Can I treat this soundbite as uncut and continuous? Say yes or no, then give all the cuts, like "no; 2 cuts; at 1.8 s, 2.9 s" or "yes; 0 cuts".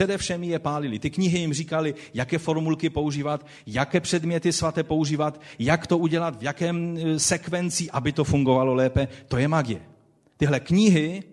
yes; 0 cuts